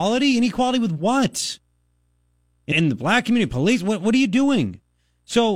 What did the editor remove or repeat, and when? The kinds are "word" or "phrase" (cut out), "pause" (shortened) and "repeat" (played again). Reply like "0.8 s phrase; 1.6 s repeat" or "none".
2.7 s word